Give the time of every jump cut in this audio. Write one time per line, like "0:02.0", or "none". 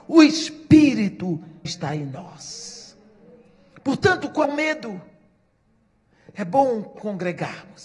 0:01.6
0:04.4